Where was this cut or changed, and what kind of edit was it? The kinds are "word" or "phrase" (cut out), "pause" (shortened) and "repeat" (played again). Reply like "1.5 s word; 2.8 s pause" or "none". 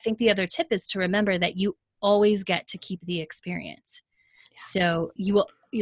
none

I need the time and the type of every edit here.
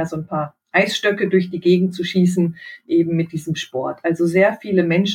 none

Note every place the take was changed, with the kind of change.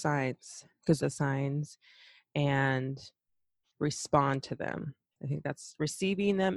1.0 s phrase

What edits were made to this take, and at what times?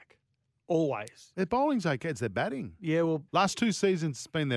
3.3 s pause

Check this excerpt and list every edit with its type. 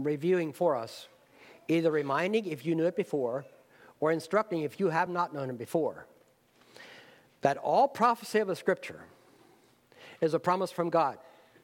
none

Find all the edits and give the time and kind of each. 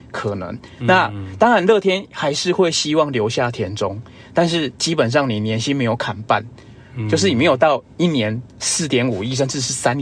none

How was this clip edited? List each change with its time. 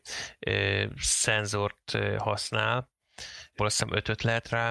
3.6 s word

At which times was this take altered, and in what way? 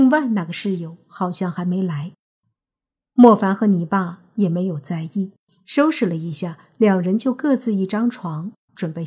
none

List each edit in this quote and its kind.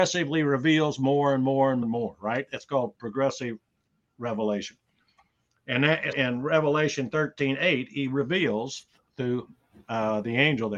1.8 s phrase; 6.1 s word

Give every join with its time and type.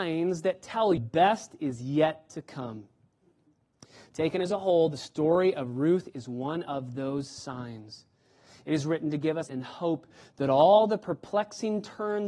1.0 s phrase; 9.5 s word

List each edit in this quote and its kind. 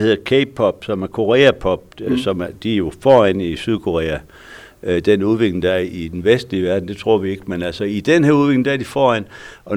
none

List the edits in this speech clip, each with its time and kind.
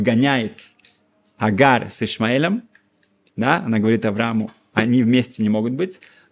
none

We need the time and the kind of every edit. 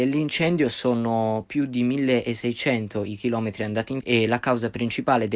4.0 s word

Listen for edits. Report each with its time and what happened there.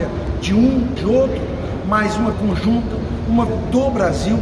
1.0 s word; 2.3 s word; 3.5 s word

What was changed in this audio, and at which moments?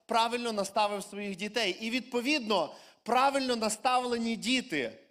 none

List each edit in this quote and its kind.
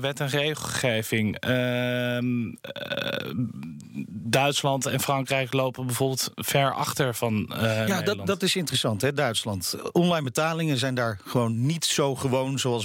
none

